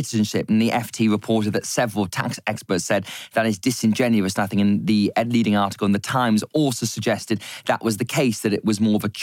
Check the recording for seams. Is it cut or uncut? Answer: uncut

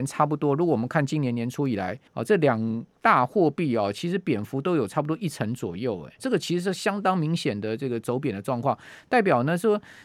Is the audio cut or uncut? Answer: cut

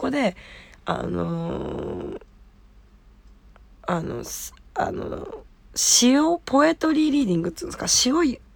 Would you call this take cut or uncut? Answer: uncut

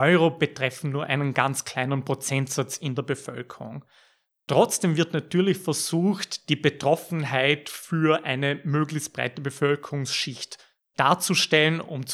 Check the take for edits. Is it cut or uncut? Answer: uncut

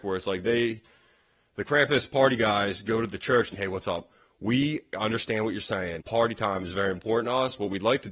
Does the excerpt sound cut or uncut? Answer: cut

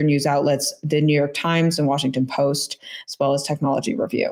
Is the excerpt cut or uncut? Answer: uncut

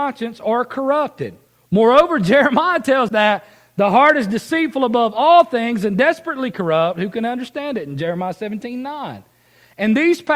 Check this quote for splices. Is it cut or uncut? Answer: cut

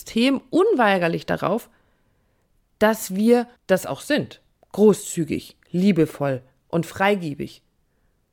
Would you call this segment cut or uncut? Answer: cut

